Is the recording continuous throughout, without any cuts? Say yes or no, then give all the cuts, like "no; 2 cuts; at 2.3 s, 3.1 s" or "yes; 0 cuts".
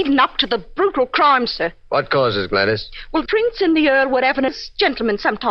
no; 2 cuts; at 3.3 s, 4.5 s